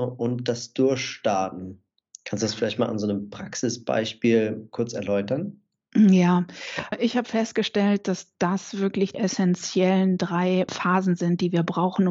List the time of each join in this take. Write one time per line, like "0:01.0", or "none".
0:06.9
0:09.1
0:10.7